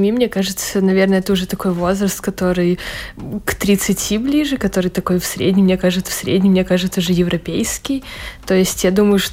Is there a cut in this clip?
yes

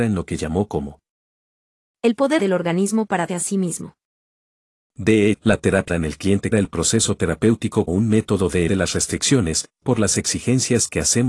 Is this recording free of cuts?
no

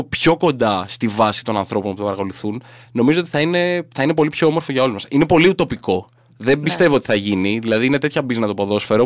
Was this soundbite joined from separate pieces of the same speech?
no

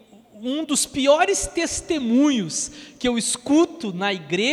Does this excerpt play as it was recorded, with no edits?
yes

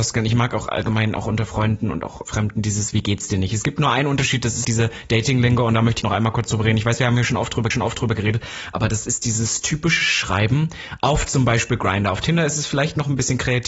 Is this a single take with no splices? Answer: no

